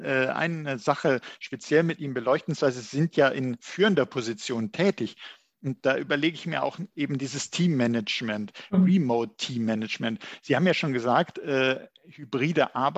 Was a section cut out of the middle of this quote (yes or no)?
no